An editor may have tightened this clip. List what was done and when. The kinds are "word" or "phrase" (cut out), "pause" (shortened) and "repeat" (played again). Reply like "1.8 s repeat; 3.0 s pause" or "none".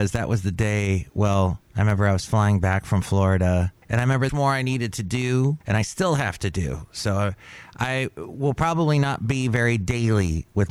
1.7 s pause; 3.8 s pause; 4.3 s phrase; 5.6 s pause